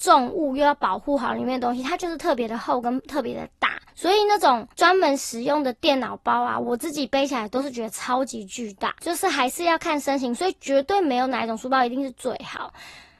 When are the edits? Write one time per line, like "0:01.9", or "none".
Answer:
0:03.9
0:04.7
0:09.0